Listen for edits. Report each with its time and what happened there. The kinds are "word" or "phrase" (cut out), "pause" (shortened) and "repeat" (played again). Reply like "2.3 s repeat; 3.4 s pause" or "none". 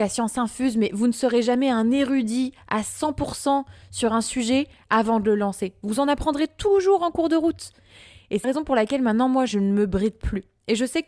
8.4 s word